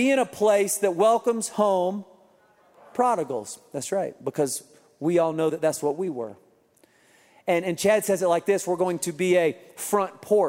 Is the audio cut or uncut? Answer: uncut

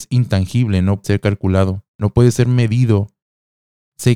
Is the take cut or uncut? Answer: cut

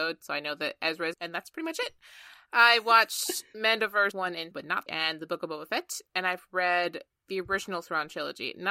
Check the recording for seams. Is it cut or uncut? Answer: cut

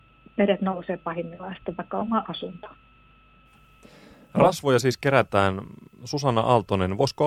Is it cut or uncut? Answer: uncut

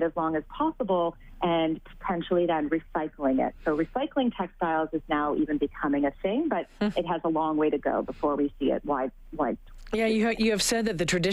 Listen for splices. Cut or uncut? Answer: uncut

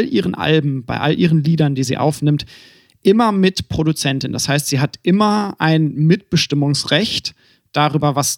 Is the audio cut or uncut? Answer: uncut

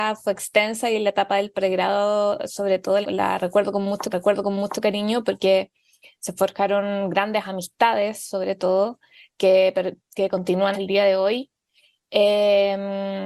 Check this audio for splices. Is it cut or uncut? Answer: cut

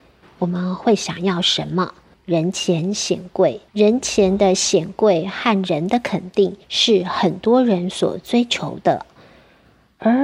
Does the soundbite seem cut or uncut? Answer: cut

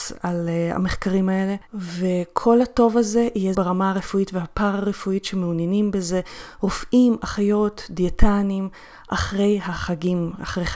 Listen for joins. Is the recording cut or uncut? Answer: cut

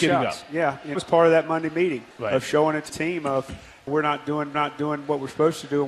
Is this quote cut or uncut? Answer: cut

